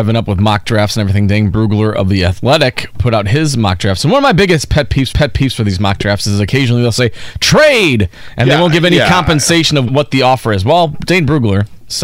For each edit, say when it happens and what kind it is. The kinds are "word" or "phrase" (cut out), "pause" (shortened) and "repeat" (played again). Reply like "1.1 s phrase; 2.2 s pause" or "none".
5.1 s repeat; 9.9 s word